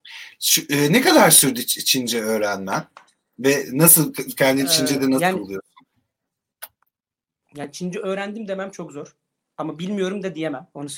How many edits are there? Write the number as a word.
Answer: zero